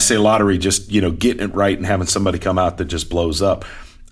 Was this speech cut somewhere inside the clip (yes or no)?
no